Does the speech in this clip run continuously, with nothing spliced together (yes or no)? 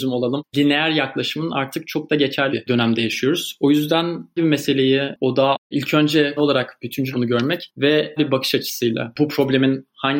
no